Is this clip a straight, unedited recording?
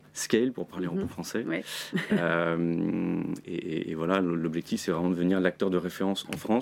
yes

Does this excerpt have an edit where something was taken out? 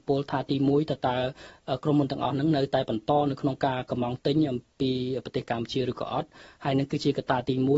no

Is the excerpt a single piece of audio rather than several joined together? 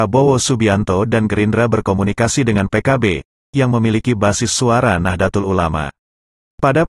yes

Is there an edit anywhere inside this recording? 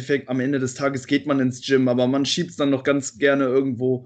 no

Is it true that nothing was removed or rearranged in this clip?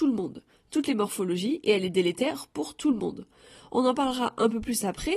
yes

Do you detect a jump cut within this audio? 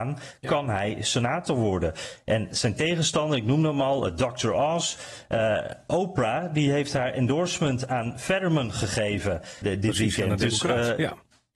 yes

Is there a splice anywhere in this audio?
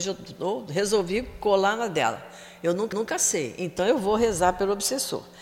yes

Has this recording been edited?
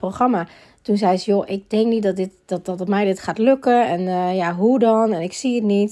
no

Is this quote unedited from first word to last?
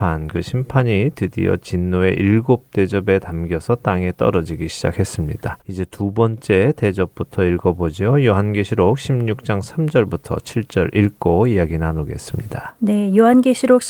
no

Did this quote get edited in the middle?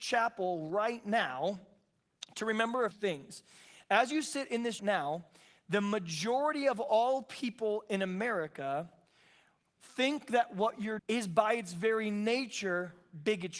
yes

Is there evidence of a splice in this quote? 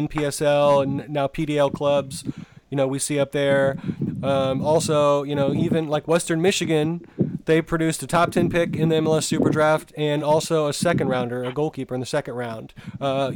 no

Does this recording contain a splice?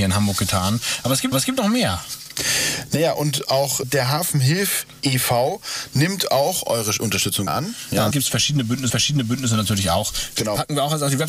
yes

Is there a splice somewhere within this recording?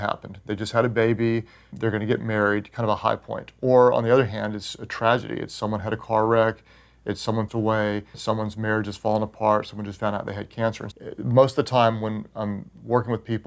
yes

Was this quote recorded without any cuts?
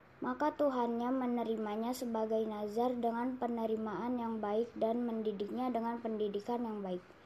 yes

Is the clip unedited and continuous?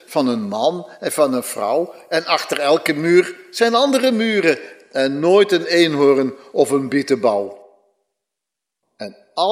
yes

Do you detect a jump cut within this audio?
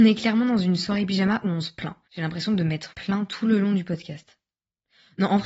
yes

